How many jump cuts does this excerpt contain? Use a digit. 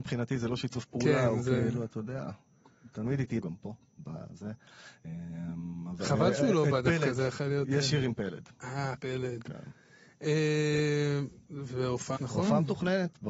3